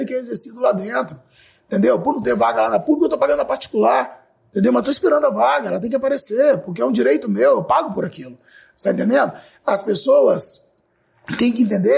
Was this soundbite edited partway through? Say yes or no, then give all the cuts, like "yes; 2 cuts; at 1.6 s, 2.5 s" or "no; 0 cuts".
no; 0 cuts